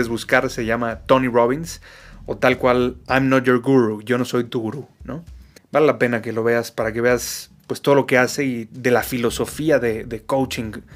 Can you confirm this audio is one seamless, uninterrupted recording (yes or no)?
no